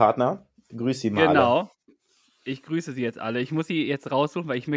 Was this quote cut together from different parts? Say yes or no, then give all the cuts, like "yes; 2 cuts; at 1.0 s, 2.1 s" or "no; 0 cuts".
no; 0 cuts